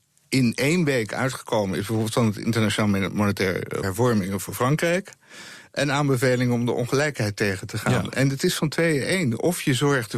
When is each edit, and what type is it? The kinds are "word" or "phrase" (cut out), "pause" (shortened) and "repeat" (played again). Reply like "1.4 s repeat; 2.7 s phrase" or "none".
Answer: 3.8 s phrase